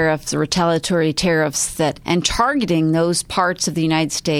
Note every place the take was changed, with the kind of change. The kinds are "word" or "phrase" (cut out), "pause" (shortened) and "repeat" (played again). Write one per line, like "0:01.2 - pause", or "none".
0:02.0 - phrase